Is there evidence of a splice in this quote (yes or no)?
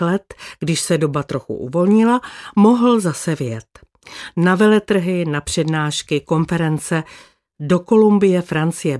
no